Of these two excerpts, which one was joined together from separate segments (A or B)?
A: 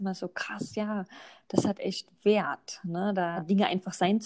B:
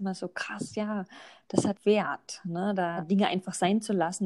B